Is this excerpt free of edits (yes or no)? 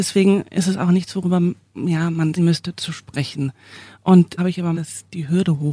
no